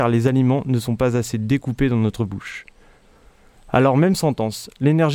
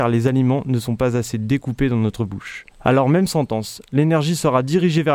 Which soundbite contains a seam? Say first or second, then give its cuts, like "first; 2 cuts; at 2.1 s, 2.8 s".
second; 1 cut; at 2.7 s